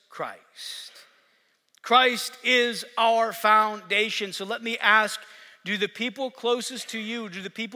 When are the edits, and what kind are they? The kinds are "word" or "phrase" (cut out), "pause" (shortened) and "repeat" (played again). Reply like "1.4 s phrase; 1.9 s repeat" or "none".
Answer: none